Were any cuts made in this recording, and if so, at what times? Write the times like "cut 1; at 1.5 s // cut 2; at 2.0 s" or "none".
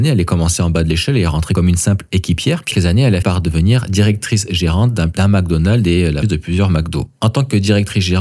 cut 1; at 2.7 s // cut 2; at 3.2 s // cut 3; at 6.2 s